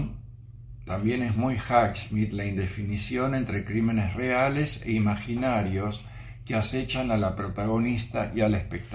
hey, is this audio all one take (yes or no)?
yes